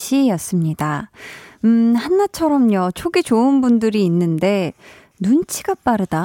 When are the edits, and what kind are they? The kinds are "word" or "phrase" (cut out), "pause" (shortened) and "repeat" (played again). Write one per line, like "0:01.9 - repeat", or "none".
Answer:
none